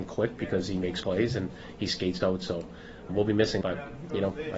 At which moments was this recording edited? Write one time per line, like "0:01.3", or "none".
0:01.0
0:02.2
0:03.1
0:03.6